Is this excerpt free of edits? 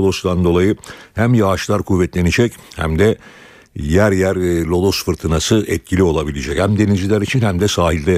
yes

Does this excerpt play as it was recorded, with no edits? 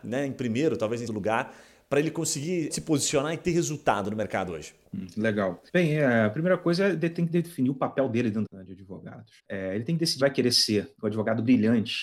no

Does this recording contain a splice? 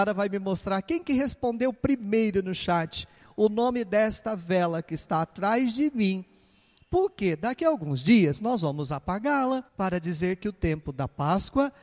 yes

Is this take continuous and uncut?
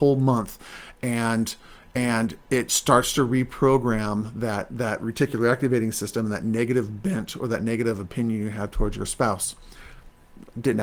yes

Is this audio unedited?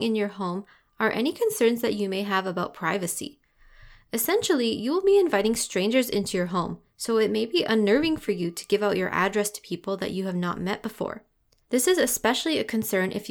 yes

